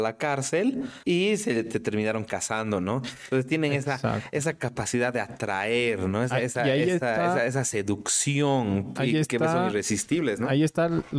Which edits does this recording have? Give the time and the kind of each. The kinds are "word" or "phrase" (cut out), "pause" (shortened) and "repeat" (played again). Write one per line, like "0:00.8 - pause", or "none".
0:01.0 - pause